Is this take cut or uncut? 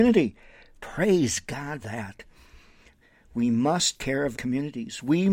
cut